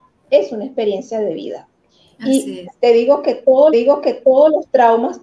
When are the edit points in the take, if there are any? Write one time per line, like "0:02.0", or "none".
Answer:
0:03.7